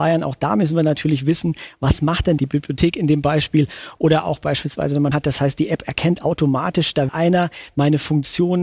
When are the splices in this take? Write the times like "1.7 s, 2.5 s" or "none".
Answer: 2.4 s, 5.1 s, 7.1 s

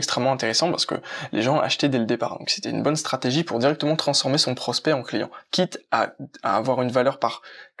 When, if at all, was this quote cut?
none

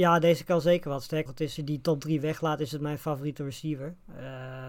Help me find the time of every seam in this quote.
1.3 s, 1.6 s

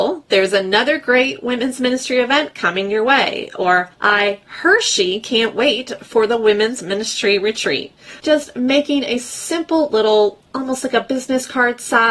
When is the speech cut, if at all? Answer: 3.9 s, 8.2 s, 10.5 s

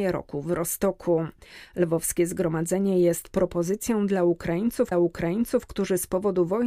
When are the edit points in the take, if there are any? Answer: 4.9 s

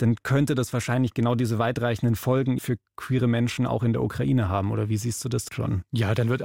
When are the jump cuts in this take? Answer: 2.6 s, 5.5 s

